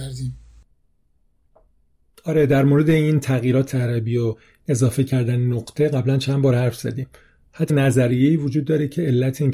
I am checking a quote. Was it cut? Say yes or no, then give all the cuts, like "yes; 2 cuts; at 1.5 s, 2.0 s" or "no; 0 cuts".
yes; 2 cuts; at 3.7 s, 7.7 s